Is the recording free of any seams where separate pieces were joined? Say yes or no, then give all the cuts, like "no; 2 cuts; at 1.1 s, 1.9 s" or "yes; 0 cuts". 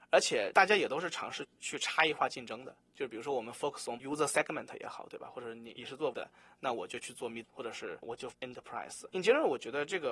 no; 4 cuts; at 4.0 s, 6.1 s, 7.4 s, 8.3 s